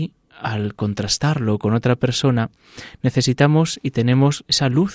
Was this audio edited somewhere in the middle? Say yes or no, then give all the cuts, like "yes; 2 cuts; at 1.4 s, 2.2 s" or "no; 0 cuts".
no; 0 cuts